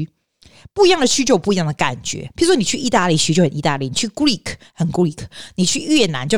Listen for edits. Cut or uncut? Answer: uncut